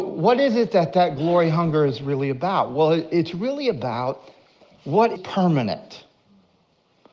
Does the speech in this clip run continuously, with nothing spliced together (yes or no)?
no